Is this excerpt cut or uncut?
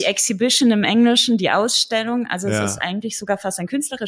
uncut